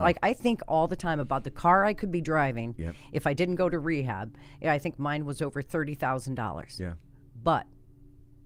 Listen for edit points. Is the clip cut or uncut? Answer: uncut